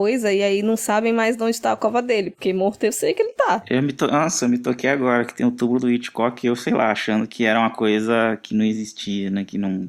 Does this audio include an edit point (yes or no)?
no